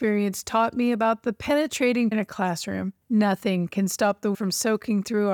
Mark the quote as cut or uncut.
cut